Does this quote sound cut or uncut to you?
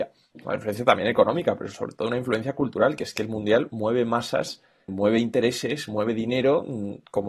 cut